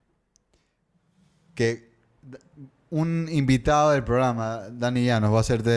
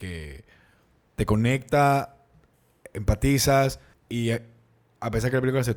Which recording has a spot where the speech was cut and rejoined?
second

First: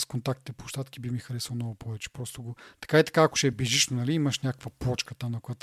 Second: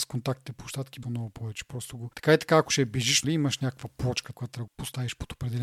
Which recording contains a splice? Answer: second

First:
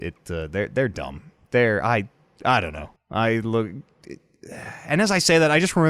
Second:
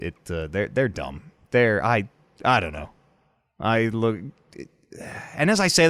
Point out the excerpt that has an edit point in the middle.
first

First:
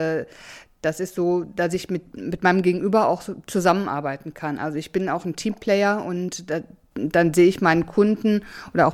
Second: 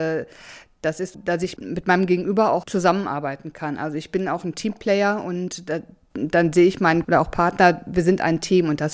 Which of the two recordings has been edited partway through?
second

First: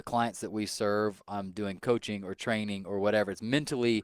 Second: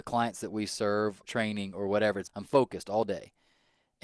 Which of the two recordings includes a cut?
second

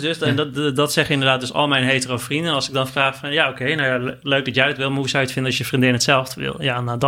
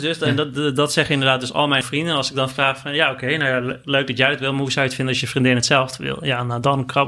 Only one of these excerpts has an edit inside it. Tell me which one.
second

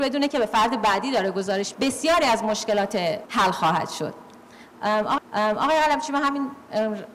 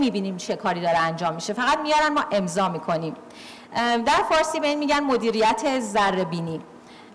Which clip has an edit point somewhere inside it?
first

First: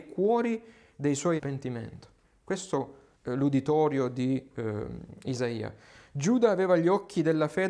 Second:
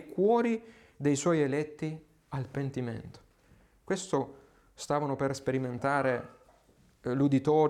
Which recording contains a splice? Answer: first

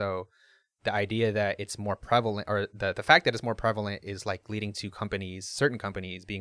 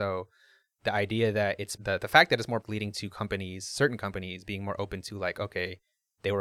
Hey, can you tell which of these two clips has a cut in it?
second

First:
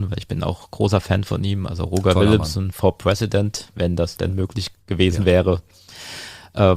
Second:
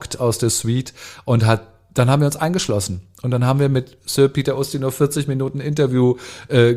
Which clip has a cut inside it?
first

